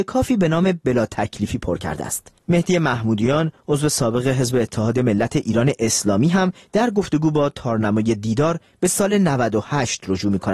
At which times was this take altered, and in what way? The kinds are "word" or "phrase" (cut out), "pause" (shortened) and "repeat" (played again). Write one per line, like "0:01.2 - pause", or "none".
0:02.4 - pause